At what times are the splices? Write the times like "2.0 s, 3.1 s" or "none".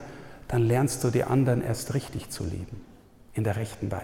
none